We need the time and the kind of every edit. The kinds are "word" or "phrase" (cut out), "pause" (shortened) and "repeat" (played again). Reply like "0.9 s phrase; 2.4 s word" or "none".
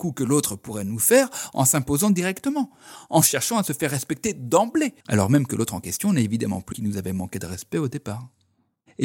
5.0 s pause; 6.7 s word